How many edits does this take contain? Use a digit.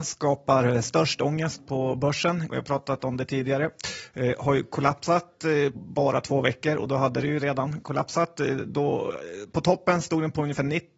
2